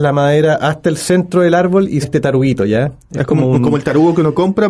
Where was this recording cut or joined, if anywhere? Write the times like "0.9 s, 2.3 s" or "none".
2.0 s